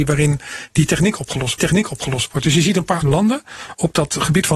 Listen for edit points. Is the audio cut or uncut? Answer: cut